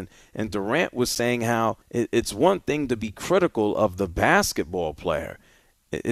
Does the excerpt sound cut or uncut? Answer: cut